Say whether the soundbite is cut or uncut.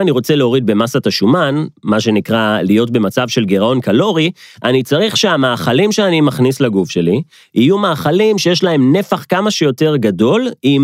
uncut